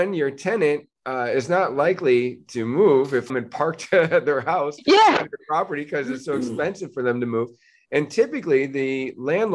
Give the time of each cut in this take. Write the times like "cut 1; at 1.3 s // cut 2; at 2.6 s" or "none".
cut 1; at 3.3 s